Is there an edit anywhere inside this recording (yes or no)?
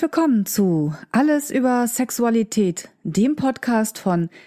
no